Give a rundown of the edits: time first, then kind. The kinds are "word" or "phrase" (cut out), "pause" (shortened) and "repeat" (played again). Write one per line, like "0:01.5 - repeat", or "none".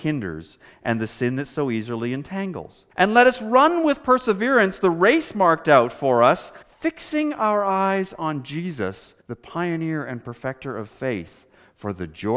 0:02.9 - pause
0:06.6 - pause
0:09.2 - pause